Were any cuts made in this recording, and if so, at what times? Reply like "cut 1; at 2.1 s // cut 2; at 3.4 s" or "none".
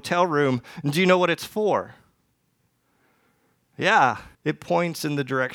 cut 1; at 4.3 s